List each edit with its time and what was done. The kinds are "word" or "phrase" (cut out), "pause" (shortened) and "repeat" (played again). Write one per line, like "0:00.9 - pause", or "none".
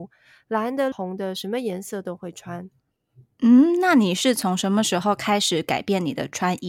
0:00.9 - phrase